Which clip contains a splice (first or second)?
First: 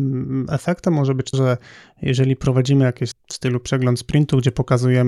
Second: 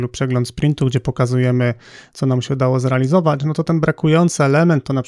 first